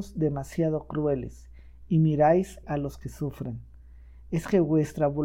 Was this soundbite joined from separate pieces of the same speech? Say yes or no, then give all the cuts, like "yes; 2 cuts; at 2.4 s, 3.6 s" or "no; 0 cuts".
yes; 1 cut; at 2.6 s